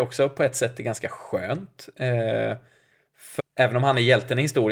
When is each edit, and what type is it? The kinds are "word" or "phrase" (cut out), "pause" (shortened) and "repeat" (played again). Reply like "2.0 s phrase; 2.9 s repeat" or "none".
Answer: 3.4 s word